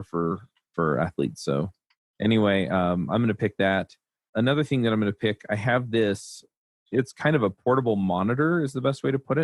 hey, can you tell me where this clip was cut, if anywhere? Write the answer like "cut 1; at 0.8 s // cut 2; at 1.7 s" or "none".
none